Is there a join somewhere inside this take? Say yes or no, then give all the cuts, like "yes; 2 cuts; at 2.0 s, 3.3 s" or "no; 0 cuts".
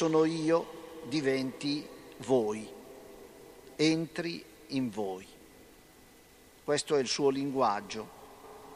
no; 0 cuts